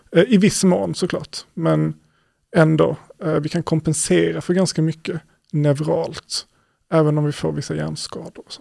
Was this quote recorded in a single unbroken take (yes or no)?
yes